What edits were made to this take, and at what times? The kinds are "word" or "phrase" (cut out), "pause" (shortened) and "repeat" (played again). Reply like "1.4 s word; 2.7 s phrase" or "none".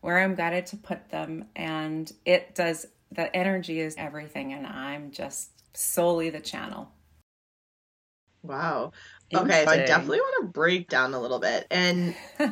4.0 s word; 5.7 s pause; 9.7 s word; 10.9 s word